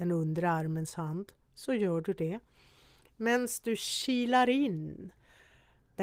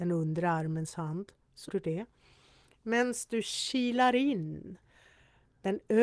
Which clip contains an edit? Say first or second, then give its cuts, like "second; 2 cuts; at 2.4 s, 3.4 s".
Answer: second; 1 cut; at 1.7 s